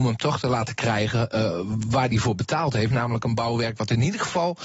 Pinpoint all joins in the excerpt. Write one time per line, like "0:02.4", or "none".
none